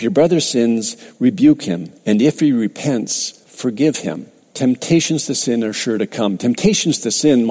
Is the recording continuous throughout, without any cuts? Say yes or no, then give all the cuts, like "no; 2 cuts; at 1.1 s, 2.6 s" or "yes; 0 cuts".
no; 3 cuts; at 2.0 s, 3.4 s, 4.4 s